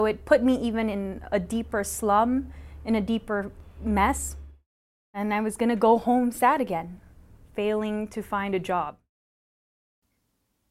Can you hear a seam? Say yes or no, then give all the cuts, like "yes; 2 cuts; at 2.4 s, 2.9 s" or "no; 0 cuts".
no; 0 cuts